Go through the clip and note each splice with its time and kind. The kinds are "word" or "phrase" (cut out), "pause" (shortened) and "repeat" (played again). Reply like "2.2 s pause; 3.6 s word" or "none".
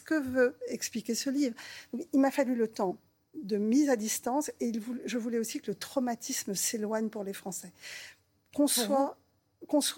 none